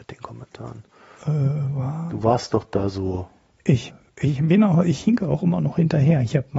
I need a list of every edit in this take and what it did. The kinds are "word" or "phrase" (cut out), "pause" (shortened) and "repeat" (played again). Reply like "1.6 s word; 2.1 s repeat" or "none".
none